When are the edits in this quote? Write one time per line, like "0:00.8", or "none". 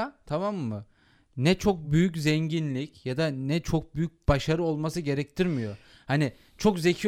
none